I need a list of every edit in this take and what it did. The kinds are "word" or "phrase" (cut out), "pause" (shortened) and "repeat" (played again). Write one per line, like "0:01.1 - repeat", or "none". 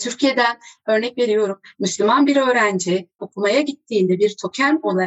0:03.2 - word